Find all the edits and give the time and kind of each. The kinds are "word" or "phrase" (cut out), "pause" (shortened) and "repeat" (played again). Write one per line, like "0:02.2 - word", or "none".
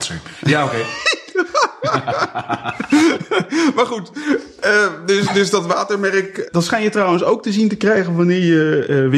none